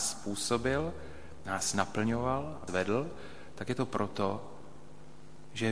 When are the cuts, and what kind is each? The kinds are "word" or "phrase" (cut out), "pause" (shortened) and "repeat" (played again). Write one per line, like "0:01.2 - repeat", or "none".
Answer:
0:01.5 - word
0:02.7 - word